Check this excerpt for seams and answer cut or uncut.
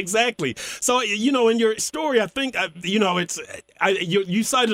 cut